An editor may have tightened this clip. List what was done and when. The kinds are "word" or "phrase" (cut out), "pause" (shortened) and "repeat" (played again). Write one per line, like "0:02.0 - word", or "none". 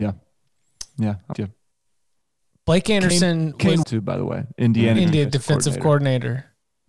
0:01.3 - word
0:03.8 - phrase